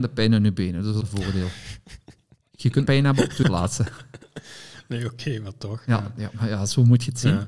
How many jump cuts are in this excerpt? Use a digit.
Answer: 3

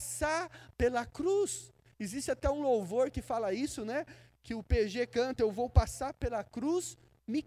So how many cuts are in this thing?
0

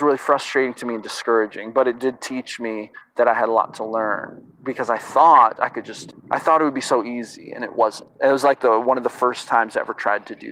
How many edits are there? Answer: 1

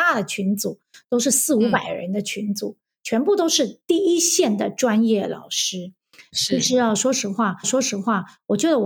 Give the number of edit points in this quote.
1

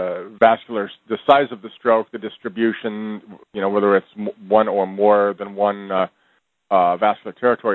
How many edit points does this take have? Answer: 0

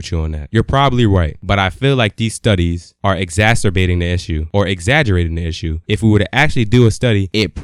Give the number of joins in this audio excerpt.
0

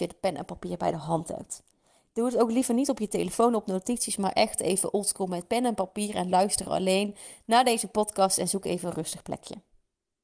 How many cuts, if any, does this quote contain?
0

